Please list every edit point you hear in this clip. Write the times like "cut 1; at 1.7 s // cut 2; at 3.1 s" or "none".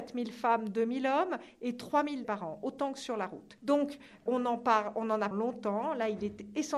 cut 1; at 2.2 s // cut 2; at 4.3 s // cut 3; at 5.3 s